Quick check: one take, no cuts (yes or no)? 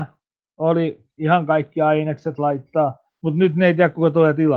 no